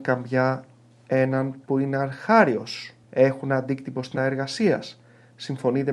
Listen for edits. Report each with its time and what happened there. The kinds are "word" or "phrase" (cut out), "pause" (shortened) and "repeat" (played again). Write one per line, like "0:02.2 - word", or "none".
0:03.0 - pause
0:04.2 - word